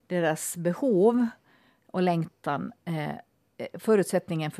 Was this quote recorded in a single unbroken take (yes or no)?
yes